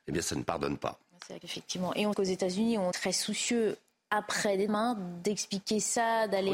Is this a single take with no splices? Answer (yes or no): no